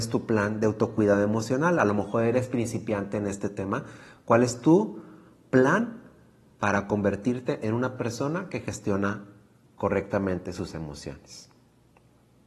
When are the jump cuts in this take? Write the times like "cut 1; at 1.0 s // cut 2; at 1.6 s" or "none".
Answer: none